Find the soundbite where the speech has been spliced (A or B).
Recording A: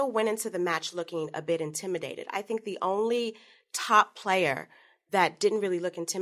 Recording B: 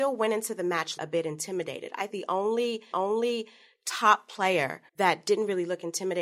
B